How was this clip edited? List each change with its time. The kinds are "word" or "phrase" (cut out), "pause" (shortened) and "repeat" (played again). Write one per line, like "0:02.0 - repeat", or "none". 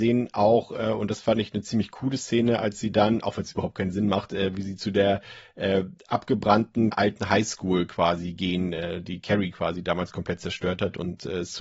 0:06.9 - phrase